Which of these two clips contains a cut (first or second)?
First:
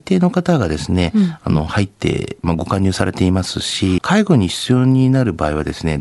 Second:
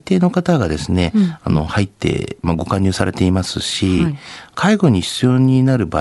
first